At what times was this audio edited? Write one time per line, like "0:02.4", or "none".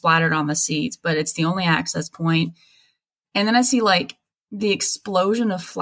none